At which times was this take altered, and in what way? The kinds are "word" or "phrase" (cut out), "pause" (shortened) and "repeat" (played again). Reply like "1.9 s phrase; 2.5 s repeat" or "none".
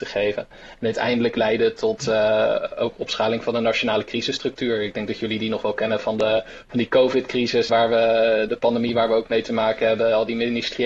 7.7 s word; 8.5 s word